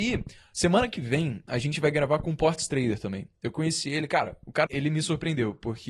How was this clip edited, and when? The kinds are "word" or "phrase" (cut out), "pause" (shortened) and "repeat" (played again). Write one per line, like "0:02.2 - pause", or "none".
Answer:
0:04.7 - word